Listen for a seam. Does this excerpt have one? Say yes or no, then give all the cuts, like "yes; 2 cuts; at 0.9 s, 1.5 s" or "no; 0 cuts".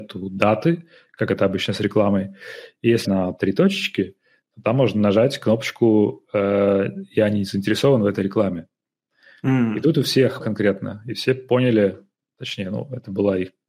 yes; 2 cuts; at 3.0 s, 10.4 s